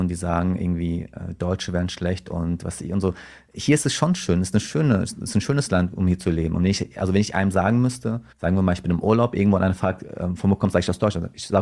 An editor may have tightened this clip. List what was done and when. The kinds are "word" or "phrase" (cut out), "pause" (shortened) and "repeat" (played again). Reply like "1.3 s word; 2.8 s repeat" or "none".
8.3 s pause